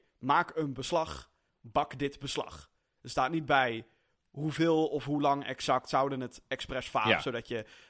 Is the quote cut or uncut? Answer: uncut